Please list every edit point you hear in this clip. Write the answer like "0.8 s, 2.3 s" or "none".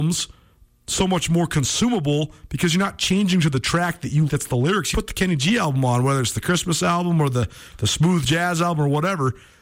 4.3 s, 4.9 s